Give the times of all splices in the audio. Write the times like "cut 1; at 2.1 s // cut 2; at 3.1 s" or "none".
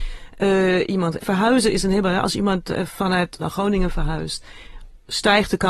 cut 1; at 1.2 s // cut 2; at 3.4 s